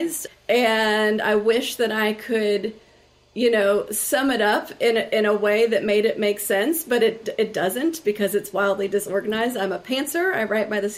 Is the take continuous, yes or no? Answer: yes